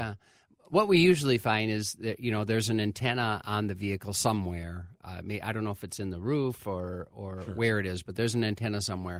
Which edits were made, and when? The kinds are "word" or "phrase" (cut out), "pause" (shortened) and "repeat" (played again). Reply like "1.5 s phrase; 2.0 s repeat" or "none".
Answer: none